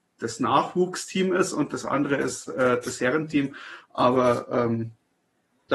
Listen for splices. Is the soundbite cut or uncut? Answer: uncut